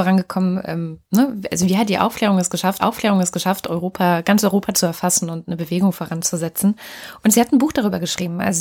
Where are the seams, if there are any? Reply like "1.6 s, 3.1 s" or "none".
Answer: 1.0 s, 2.8 s